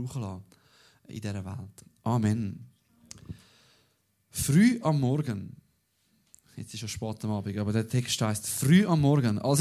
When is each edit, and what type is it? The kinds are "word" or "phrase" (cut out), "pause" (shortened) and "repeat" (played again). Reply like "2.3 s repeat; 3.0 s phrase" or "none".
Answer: none